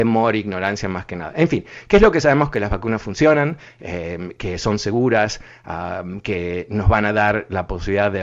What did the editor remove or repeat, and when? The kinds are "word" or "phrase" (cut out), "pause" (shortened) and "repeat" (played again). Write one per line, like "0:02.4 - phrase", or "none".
none